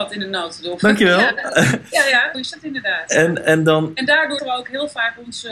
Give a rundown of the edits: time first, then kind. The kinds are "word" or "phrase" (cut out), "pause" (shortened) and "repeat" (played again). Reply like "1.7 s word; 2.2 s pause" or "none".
2.3 s word; 4.4 s word